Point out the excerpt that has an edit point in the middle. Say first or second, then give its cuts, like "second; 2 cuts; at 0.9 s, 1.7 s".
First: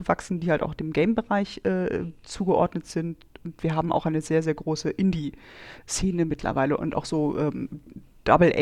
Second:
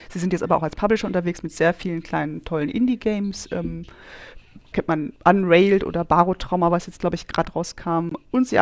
second; 2 cuts; at 4.7 s, 5.2 s